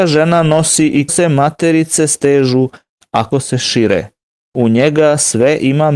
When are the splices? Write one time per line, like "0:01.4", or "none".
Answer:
0:01.1
0:03.3